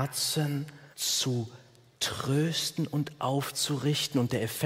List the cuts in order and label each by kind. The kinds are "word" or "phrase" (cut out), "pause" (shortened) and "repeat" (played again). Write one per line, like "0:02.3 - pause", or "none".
0:00.9 - pause